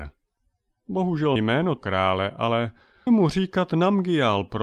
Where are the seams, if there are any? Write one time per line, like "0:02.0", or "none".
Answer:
0:01.4
0:01.8
0:03.1